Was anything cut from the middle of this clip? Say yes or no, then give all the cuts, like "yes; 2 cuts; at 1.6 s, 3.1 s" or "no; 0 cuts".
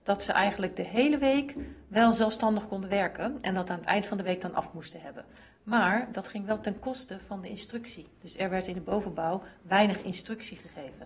no; 0 cuts